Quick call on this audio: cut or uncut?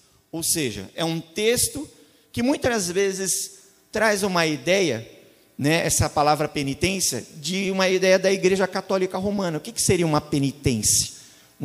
uncut